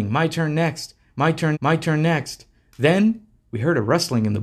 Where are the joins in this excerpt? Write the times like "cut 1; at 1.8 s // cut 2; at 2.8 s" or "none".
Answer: cut 1; at 1.5 s